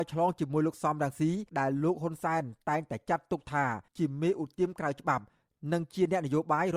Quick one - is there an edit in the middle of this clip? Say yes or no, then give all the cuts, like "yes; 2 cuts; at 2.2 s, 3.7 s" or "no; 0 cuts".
yes; 2 cuts; at 1.5 s, 3.9 s